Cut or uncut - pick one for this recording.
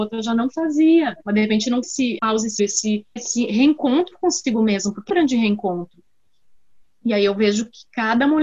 cut